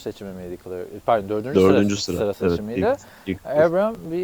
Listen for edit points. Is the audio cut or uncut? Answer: uncut